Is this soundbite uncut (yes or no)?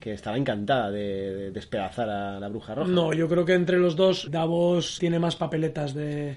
no